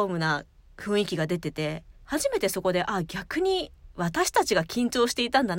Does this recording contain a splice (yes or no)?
yes